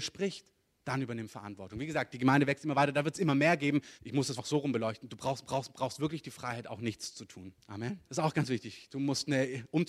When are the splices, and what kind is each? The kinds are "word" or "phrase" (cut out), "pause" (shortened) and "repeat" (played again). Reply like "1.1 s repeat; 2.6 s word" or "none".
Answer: 4.0 s pause; 4.4 s word; 5.4 s repeat; 8.1 s pause